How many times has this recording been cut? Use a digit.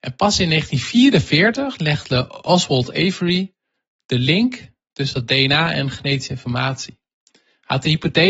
0